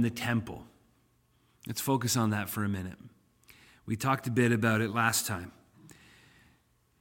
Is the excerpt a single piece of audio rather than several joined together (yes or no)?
yes